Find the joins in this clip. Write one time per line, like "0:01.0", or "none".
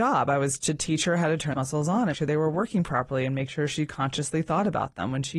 0:01.5
0:02.1